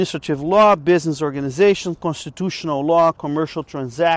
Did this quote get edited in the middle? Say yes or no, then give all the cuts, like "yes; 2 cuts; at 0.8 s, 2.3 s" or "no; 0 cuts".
no; 0 cuts